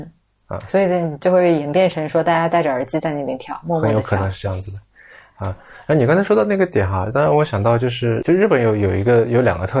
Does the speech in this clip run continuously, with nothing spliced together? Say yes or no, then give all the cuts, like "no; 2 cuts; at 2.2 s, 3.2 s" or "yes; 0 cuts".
yes; 0 cuts